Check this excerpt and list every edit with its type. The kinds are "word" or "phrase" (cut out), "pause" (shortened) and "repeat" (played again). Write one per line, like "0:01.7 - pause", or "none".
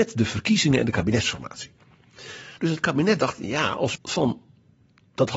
0:02.6 - pause
0:03.9 - phrase